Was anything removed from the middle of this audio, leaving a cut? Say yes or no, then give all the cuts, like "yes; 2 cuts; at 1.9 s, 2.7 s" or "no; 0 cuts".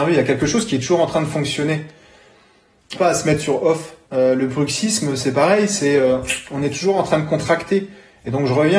yes; 2 cuts; at 3.0 s, 4.0 s